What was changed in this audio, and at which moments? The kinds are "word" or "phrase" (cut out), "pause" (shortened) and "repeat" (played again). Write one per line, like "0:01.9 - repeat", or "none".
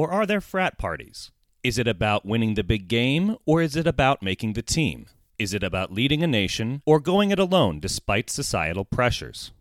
none